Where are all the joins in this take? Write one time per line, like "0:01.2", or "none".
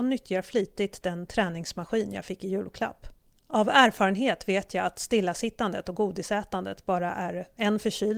none